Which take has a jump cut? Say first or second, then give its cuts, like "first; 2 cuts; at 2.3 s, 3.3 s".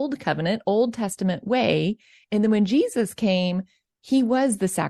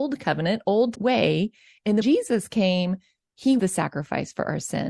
second; 3 cuts; at 0.9 s, 2.0 s, 3.6 s